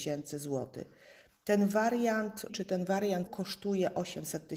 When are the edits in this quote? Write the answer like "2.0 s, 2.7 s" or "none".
2.5 s, 3.3 s